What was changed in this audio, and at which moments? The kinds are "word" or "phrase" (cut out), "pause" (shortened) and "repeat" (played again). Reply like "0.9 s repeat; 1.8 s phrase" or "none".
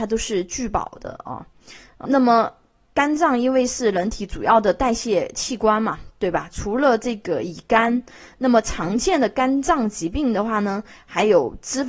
2.0 s word